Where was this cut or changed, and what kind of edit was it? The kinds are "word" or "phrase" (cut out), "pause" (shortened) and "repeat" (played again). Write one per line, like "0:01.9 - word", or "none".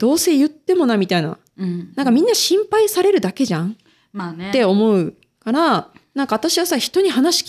none